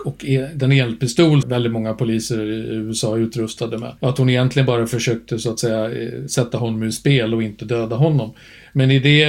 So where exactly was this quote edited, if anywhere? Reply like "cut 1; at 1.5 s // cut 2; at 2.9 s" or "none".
cut 1; at 1.4 s // cut 2; at 4.0 s